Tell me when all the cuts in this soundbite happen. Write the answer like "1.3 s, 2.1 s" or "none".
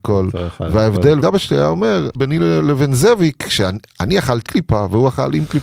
1.2 s, 2.1 s, 4.4 s